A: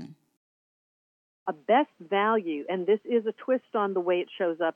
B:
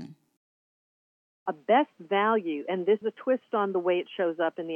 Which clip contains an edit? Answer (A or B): B